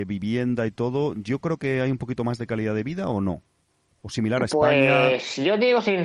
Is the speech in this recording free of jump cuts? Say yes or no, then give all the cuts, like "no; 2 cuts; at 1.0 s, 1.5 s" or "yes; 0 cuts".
yes; 0 cuts